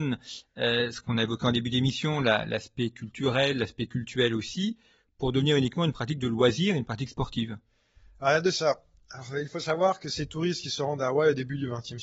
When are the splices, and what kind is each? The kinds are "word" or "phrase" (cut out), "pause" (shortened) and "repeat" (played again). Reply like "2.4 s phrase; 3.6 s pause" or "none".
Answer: none